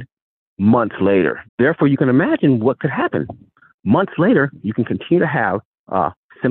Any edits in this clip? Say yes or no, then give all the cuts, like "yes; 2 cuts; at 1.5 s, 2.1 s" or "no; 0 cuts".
yes; 1 cut; at 1.5 s